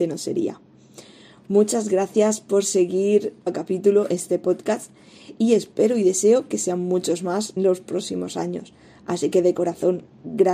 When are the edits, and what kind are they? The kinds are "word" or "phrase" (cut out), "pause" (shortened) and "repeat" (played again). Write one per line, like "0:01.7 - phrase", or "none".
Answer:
0:03.5 - word
0:07.6 - word